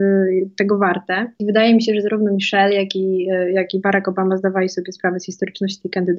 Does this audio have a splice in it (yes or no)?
no